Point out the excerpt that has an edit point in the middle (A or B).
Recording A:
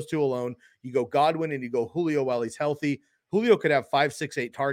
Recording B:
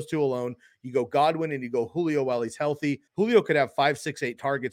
B